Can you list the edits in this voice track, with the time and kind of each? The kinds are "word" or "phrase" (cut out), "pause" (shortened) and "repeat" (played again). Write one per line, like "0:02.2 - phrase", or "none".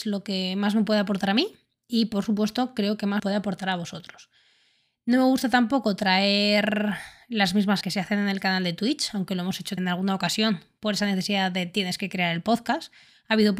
0:03.2 - word
0:07.8 - word
0:09.8 - word